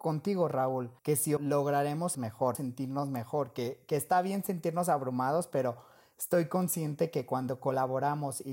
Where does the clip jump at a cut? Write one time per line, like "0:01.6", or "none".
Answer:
0:01.0
0:01.4
0:02.1
0:02.5